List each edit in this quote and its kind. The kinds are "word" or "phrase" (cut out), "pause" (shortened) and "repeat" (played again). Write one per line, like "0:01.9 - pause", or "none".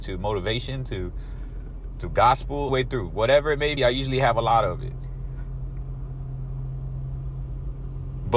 0:02.7 - phrase
0:03.8 - word